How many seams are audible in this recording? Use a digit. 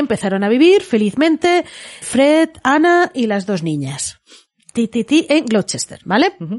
1